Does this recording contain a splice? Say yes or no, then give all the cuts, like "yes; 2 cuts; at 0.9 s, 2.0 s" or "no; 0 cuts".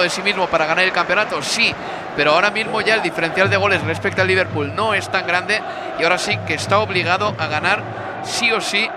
no; 0 cuts